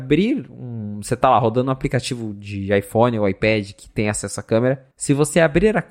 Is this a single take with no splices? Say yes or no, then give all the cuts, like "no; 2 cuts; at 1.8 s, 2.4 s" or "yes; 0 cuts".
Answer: no; 1 cut; at 4.9 s